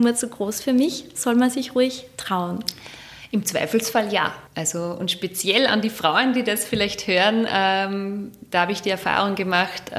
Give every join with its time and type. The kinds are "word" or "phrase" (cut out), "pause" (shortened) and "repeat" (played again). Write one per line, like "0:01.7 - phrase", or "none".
0:04.5 - pause

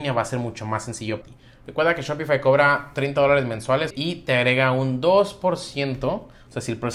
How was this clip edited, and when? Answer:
0:01.2 - word
0:03.9 - word

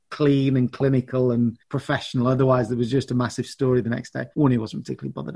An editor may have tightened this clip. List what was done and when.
0:01.6 - pause
0:04.3 - pause

